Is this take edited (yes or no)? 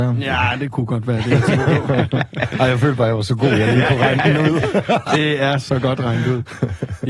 no